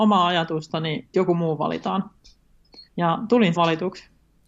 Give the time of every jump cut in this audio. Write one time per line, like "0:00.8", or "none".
0:01.1
0:02.9
0:03.5